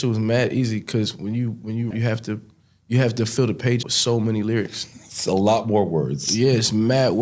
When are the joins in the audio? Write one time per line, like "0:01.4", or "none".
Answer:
0:01.9
0:03.8